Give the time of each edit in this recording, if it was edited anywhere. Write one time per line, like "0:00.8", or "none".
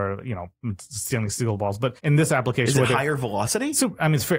0:02.0